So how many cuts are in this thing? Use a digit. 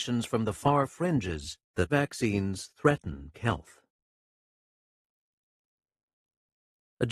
2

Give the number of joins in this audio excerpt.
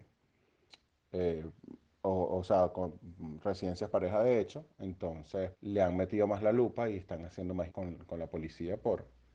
4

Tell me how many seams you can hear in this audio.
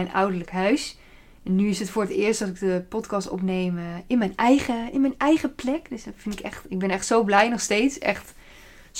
0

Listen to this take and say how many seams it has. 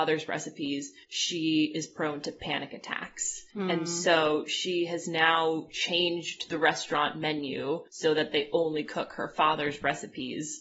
3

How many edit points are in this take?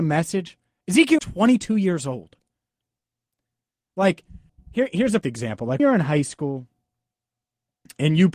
4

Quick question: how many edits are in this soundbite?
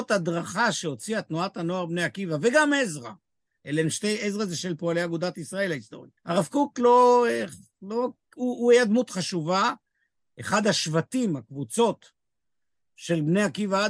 1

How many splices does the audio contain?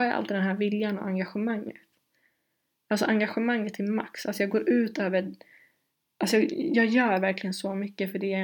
0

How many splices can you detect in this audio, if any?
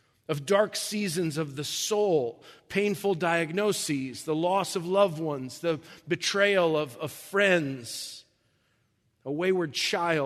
0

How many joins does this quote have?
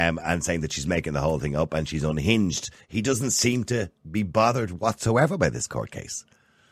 0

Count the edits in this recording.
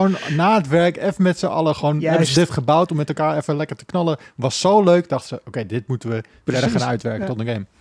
0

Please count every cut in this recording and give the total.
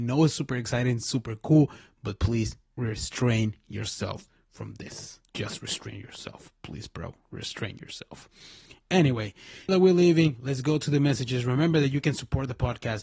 3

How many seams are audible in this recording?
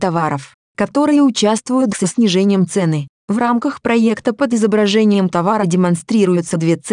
1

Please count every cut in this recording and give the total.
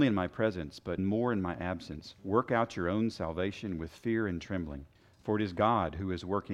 3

